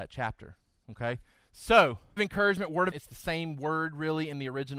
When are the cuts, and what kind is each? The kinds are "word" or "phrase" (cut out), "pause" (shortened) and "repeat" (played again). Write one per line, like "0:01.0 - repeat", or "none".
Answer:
0:02.2 - word
0:02.9 - word